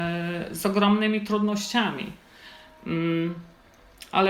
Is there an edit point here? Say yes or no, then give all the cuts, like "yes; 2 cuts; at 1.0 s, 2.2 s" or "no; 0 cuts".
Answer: no; 0 cuts